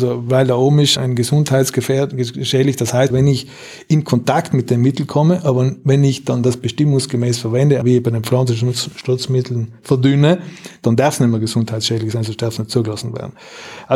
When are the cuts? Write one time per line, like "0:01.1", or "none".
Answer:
0:01.0
0:03.1
0:07.8